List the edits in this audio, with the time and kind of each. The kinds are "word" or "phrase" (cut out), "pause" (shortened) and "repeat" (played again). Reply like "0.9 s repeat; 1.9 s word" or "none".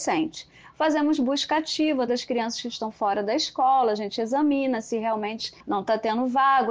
2.1 s word; 5.6 s pause